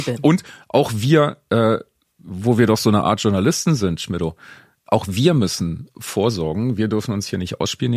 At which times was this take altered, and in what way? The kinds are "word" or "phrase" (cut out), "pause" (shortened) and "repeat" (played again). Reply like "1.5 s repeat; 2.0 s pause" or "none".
none